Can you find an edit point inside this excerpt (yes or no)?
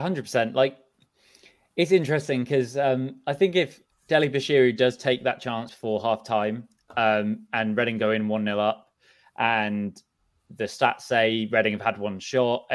yes